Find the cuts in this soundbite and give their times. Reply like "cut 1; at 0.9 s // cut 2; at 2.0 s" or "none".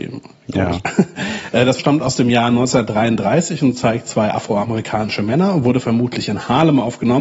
cut 1; at 1.8 s